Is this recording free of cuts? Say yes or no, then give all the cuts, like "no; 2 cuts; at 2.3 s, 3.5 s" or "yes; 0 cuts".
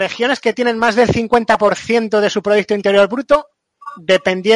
yes; 0 cuts